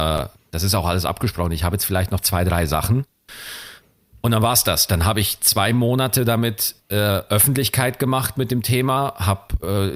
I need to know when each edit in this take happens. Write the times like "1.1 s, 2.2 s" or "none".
none